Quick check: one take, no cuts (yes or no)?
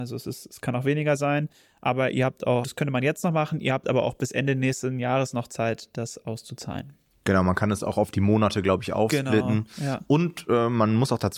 no